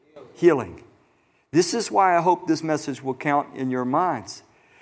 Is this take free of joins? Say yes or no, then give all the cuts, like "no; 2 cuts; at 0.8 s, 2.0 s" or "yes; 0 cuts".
yes; 0 cuts